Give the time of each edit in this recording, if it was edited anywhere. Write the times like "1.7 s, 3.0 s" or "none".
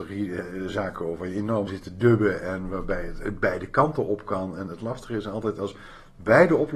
1.7 s